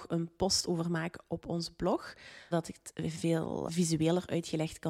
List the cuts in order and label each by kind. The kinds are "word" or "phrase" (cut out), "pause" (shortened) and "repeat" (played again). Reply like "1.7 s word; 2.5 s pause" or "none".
2.5 s word; 3.7 s word